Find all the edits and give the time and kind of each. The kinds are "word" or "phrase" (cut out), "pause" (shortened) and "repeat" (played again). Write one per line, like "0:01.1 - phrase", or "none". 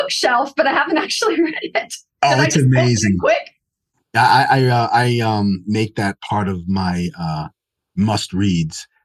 none